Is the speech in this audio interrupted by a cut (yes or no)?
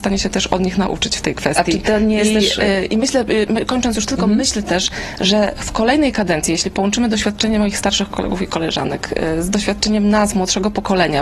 no